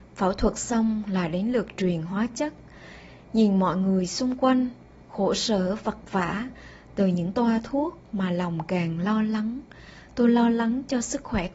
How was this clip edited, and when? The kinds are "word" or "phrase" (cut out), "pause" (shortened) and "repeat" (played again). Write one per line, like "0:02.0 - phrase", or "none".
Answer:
none